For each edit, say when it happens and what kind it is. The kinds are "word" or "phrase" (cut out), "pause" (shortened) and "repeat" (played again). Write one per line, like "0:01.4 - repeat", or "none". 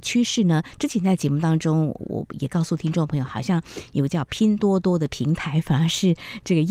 0:02.0 - word